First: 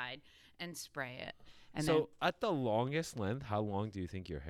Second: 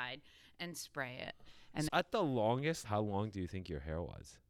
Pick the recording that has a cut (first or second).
second